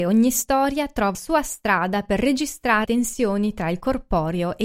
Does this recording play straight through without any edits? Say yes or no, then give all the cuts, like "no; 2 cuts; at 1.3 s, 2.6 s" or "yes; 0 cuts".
no; 2 cuts; at 1.1 s, 2.8 s